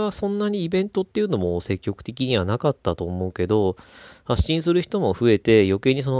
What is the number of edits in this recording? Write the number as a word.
zero